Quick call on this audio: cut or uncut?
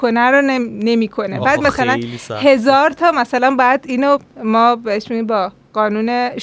uncut